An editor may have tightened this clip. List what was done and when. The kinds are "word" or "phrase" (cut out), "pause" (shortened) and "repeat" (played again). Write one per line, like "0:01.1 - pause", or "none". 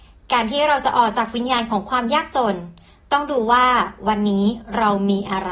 none